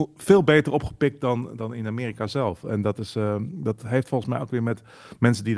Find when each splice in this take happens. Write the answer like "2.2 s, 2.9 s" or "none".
none